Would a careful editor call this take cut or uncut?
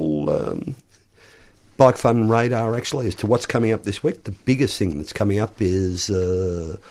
uncut